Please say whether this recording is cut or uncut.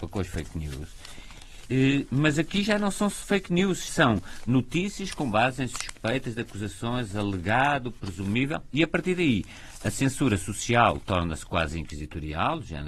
cut